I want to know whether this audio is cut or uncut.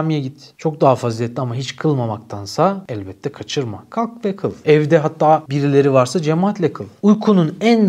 uncut